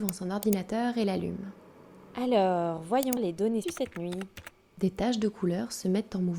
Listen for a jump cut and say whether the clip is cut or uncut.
cut